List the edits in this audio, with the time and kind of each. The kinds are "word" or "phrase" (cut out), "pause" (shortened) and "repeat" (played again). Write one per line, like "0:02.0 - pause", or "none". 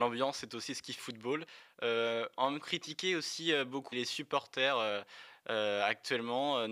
0:01.0 - word
0:02.6 - phrase
0:03.9 - word